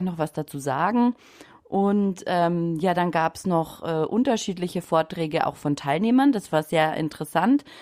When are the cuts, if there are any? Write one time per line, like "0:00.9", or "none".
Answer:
none